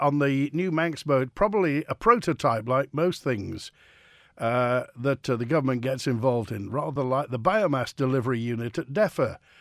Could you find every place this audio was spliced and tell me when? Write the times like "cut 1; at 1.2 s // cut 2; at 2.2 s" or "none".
none